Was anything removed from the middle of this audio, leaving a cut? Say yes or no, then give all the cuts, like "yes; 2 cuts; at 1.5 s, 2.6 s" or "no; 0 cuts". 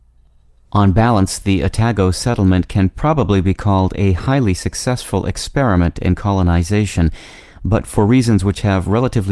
no; 0 cuts